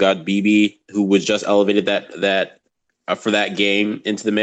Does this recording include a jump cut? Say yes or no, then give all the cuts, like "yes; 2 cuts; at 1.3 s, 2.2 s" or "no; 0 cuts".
no; 0 cuts